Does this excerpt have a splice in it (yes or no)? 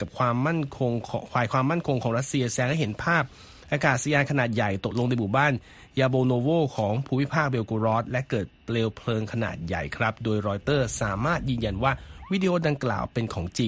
no